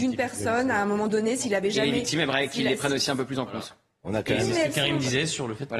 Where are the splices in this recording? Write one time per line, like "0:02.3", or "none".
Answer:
none